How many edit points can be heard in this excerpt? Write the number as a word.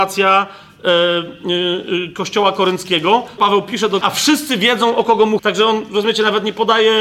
three